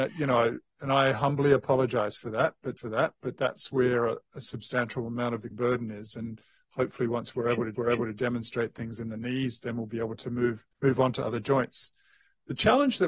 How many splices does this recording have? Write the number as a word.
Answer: four